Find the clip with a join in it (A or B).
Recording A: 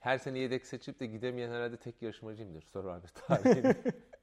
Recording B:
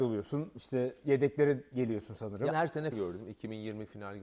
B